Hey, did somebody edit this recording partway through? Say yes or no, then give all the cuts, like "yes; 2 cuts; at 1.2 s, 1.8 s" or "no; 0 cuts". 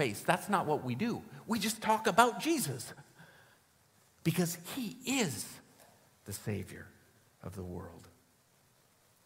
no; 0 cuts